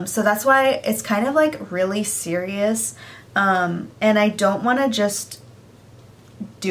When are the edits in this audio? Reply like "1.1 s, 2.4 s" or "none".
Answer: 3.9 s